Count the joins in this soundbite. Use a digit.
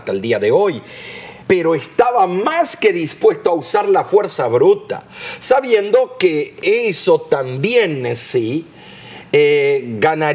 1